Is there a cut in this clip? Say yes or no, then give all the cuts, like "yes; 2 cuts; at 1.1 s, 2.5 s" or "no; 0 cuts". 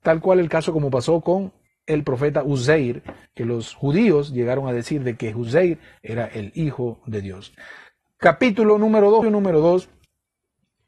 yes; 1 cut; at 9.2 s